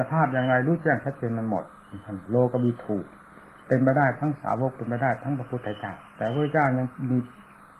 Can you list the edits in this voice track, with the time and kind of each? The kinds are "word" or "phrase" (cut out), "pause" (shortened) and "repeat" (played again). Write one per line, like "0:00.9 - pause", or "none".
0:06.1 - pause